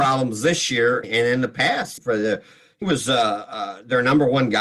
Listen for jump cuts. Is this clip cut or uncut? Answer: cut